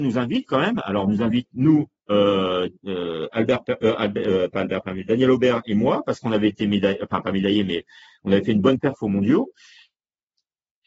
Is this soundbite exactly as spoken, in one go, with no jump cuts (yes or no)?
yes